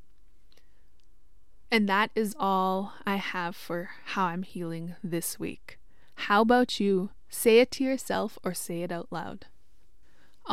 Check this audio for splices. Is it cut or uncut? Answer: uncut